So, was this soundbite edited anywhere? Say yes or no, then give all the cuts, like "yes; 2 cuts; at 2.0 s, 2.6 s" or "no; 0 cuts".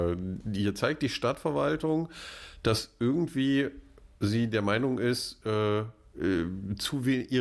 no; 0 cuts